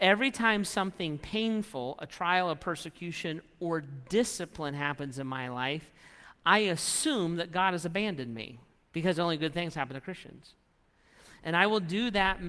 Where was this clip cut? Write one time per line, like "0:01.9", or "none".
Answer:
none